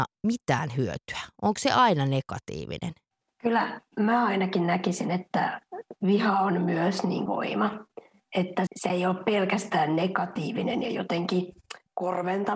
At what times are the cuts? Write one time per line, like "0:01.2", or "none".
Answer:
0:03.1
0:07.3
0:08.7

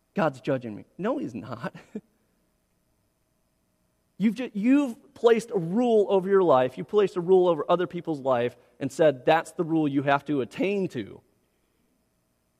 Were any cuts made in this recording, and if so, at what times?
none

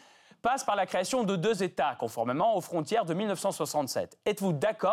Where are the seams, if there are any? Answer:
none

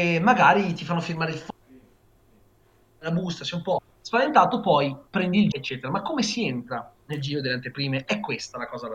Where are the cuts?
0:03.9
0:05.5

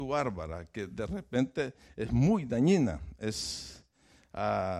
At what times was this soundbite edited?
none

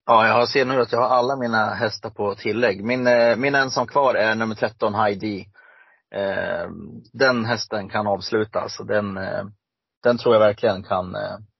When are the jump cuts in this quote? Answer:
none

